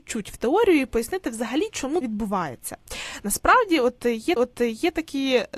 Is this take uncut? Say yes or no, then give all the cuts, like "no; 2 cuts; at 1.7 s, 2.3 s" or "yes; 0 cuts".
no; 2 cuts; at 2.0 s, 4.4 s